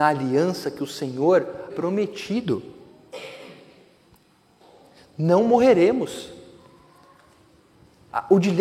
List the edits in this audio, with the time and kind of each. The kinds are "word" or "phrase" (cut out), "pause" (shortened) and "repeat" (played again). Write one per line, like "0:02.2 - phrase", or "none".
0:01.7 - word